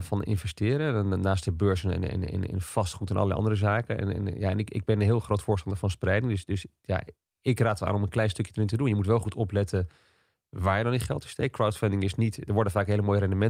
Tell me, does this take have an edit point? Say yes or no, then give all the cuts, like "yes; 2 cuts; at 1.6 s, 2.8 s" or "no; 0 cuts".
no; 0 cuts